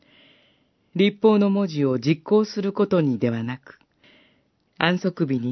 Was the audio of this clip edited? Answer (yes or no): no